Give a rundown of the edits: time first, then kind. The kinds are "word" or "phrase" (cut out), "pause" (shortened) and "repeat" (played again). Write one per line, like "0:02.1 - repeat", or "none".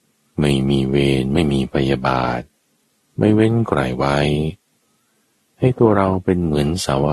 none